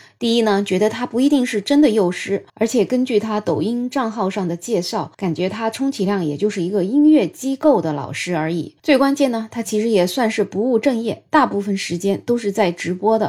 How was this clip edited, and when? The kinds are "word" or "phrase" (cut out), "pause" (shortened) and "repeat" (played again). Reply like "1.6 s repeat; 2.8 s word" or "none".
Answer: 2.5 s pause; 5.1 s pause; 8.8 s pause